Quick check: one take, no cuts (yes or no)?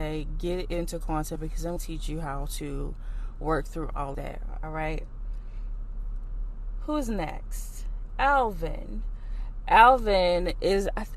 no